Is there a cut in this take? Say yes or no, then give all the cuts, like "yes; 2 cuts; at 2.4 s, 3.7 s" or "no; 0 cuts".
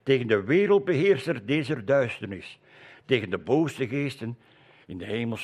no; 0 cuts